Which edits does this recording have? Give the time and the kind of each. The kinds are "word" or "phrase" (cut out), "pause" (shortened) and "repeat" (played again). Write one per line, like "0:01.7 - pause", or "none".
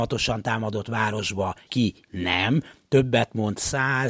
0:01.7 - word